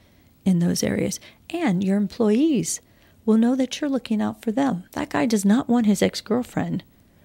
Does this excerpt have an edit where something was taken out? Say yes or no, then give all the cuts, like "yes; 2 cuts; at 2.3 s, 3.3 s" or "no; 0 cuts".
yes; 1 cut; at 4.9 s